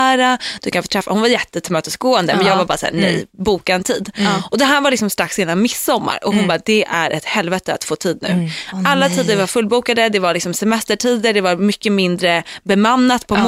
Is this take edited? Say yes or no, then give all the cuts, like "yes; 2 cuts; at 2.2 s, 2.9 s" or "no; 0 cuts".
yes; 1 cut; at 2.9 s